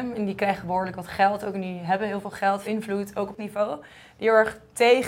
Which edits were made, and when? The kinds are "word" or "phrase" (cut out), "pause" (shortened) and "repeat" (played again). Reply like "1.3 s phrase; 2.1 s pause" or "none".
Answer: 2.6 s word; 3.4 s word